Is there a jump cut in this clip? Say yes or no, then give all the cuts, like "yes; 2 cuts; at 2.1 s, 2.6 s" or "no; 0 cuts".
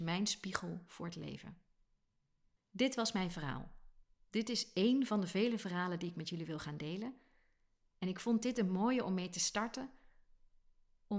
no; 0 cuts